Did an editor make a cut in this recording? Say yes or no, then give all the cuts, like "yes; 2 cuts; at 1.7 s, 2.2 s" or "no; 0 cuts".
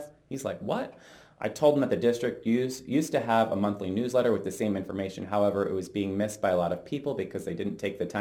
no; 0 cuts